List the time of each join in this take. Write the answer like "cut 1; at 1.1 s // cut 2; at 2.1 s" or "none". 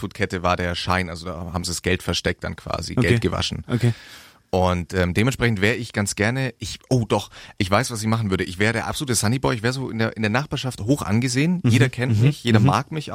none